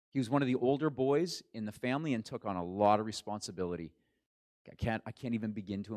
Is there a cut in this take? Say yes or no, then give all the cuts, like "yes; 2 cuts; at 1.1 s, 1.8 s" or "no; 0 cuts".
no; 0 cuts